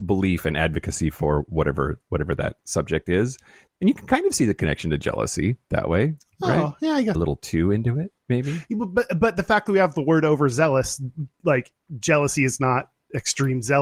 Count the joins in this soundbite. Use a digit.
4